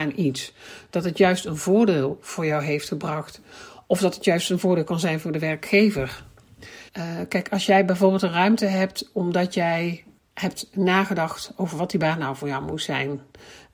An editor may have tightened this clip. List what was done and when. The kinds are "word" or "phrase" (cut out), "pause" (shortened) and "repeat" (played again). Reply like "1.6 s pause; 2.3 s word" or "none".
6.9 s pause; 10.2 s pause

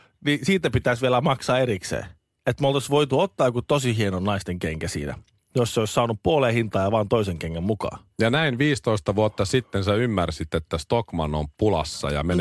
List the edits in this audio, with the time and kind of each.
none

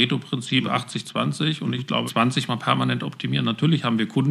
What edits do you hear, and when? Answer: 2.1 s word; 2.5 s word

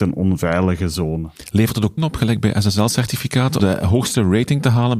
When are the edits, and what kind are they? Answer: 2.0 s word; 3.6 s word

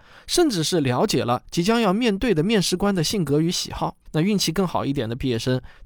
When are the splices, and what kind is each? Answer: 4.0 s pause

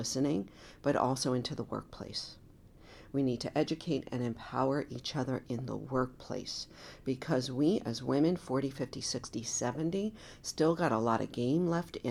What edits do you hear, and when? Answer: none

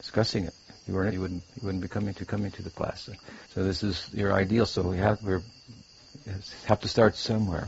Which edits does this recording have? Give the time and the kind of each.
1.1 s phrase; 2.2 s repeat; 3.4 s pause; 5.2 s word

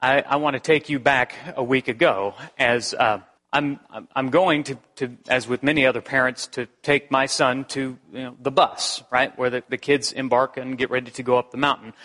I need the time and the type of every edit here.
3.4 s pause

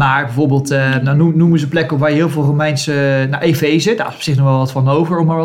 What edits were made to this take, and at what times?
none

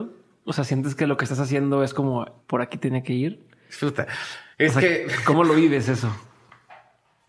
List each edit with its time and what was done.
2.4 s pause; 4.5 s pause

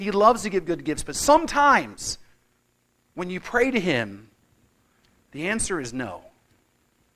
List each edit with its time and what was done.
none

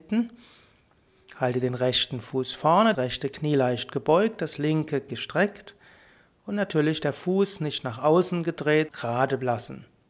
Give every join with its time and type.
2.9 s word; 5.1 s word; 8.9 s word

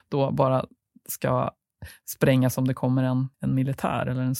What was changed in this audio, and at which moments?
3.3 s pause

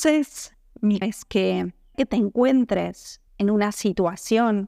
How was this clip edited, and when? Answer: 1.0 s word; 1.9 s word; 3.3 s pause

